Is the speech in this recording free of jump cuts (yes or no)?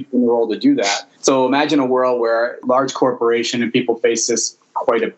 no